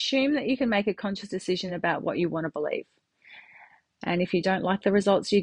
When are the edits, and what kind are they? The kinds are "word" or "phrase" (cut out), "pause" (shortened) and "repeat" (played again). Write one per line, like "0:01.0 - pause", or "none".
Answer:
none